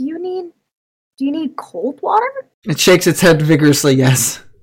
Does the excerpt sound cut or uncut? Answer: cut